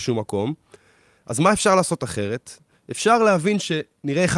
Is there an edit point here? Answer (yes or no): no